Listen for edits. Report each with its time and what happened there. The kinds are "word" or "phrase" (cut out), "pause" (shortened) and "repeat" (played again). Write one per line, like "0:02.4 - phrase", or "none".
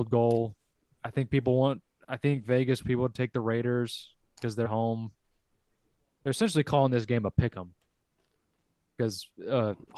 0:02.8 - word
0:04.6 - word